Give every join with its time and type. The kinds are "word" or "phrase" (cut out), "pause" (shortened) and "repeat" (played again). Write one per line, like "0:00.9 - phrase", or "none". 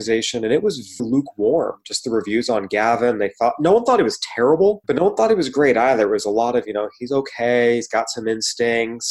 0:01.0 - word
0:04.8 - pause